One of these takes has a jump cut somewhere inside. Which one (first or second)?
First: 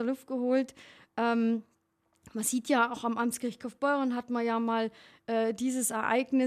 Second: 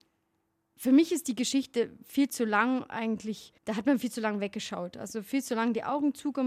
second